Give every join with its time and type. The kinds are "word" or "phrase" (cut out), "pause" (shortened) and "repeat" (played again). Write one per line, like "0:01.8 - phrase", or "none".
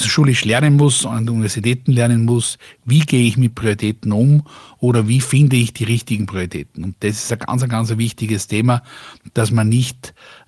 none